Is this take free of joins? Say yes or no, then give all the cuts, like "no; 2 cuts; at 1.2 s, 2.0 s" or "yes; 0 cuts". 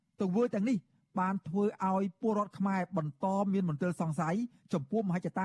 yes; 0 cuts